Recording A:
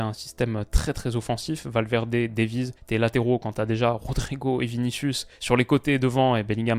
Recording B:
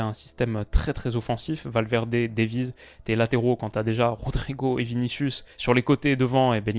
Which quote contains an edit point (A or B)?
A